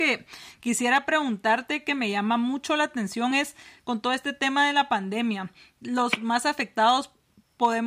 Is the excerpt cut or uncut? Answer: uncut